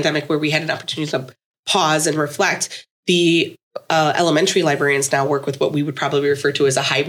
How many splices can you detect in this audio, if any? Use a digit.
0